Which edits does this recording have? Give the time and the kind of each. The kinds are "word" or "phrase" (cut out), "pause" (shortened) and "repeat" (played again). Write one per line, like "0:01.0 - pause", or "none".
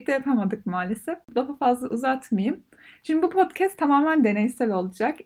none

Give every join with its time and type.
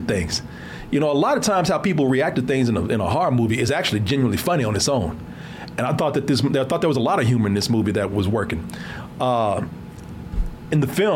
none

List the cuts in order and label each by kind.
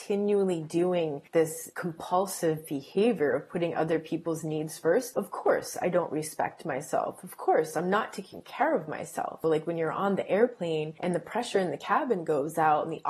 none

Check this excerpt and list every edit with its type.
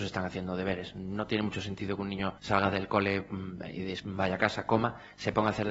0:02.4 - pause

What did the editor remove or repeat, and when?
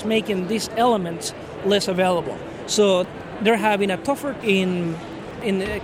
0:04.4 - word

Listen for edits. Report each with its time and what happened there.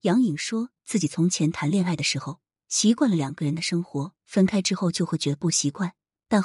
0:04.2 - pause

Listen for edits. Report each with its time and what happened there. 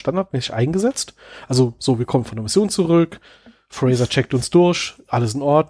none

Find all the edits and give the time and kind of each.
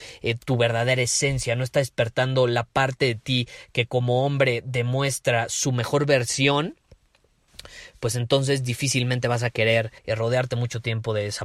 0:10.0 - pause

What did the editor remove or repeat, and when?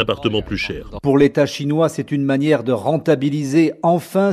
none

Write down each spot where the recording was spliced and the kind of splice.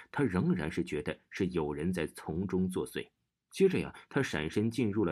0:03.3 - pause

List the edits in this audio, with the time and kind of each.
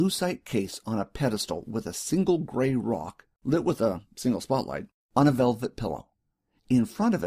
0:03.3 - pause
0:05.0 - pause

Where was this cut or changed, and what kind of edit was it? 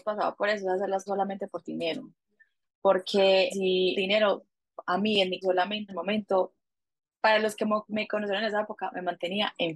0:01.1 - word
0:03.5 - word
0:03.9 - word
0:05.4 - word
0:05.9 - word

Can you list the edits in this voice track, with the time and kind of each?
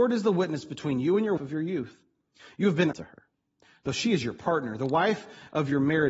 0:01.4 - word
0:02.9 - word

